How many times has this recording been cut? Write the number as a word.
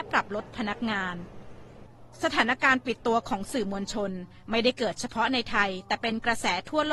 one